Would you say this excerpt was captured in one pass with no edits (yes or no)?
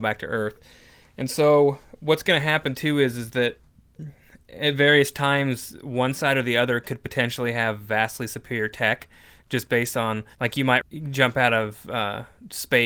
no